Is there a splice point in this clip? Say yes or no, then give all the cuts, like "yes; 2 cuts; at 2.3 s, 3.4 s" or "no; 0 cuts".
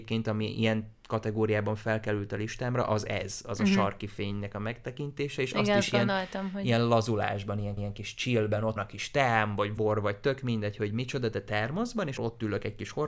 yes; 4 cuts; at 7.8 s, 8.8 s, 9.8 s, 12.2 s